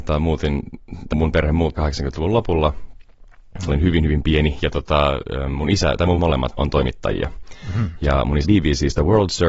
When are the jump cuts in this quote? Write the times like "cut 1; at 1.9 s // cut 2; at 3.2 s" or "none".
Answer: cut 1; at 1.1 s // cut 2; at 1.7 s // cut 3; at 3.7 s // cut 4; at 6.2 s // cut 5; at 6.5 s // cut 6; at 8.4 s

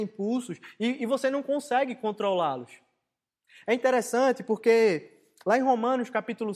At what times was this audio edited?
none

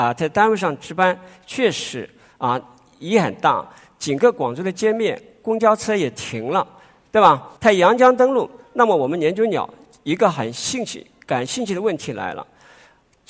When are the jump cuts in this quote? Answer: cut 1; at 7.6 s

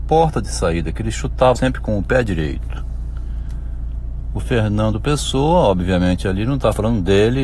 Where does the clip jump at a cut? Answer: cut 1; at 1.6 s

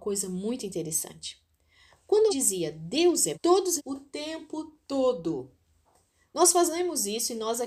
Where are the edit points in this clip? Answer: cut 1; at 2.3 s // cut 2; at 3.3 s // cut 3; at 3.8 s

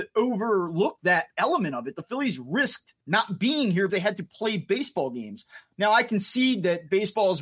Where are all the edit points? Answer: cut 1; at 3.0 s // cut 2; at 3.9 s

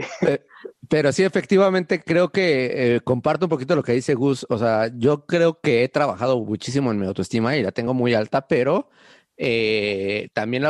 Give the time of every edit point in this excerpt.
none

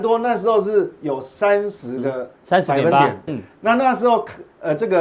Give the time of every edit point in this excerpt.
cut 1; at 3.3 s

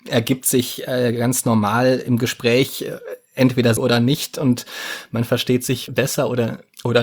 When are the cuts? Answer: cut 1; at 3.8 s // cut 2; at 5.9 s

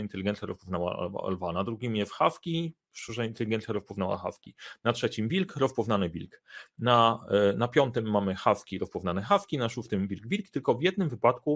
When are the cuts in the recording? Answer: none

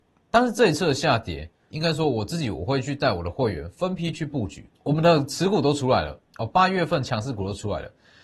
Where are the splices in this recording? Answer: cut 1; at 1.7 s // cut 2; at 4.8 s

